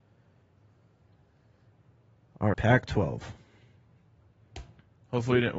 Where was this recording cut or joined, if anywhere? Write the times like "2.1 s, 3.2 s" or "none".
2.5 s

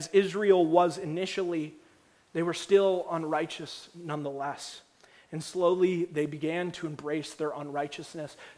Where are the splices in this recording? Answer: none

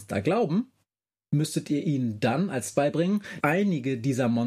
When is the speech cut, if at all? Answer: 2.7 s, 3.4 s

